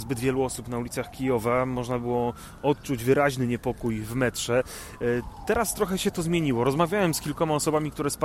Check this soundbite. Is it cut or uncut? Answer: uncut